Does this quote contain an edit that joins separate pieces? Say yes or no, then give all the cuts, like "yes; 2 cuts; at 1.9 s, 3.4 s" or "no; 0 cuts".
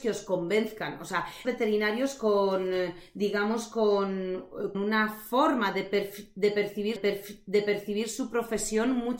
yes; 3 cuts; at 1.4 s, 4.7 s, 7.0 s